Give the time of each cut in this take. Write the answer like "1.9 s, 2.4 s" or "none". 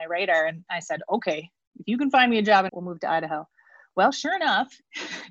2.7 s